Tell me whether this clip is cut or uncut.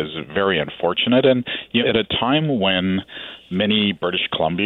cut